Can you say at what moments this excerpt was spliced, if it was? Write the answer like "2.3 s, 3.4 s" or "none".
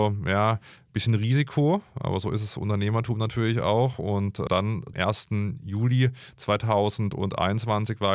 4.9 s